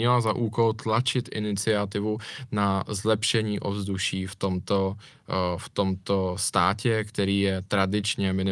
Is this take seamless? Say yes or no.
yes